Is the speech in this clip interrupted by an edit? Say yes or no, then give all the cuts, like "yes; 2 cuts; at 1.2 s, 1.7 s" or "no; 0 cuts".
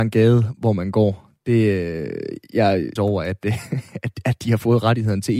yes; 1 cut; at 3.0 s